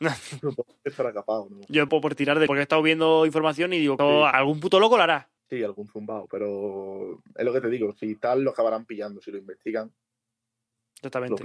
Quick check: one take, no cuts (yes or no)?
no